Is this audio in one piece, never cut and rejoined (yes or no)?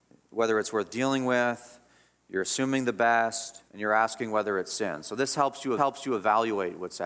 no